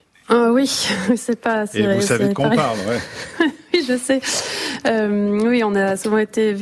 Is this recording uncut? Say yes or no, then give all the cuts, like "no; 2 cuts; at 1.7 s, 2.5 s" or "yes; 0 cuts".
yes; 0 cuts